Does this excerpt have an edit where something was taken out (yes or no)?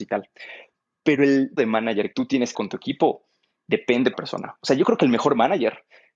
yes